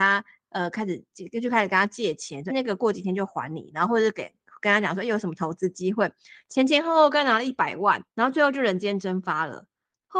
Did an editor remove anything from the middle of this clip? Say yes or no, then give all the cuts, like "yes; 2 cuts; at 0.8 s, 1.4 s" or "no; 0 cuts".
yes; 2 cuts; at 2.5 s, 8.1 s